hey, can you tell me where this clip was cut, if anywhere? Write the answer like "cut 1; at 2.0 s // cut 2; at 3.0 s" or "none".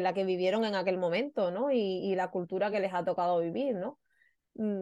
none